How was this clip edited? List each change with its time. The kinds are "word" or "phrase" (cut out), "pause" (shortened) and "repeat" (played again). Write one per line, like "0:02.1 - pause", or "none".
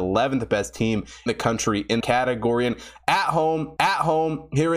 0:01.3 - word
0:02.0 - word
0:03.8 - repeat